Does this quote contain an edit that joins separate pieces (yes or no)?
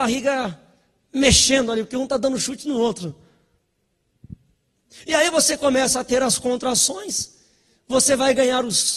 no